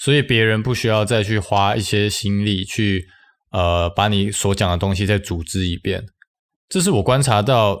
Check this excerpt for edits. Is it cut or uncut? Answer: uncut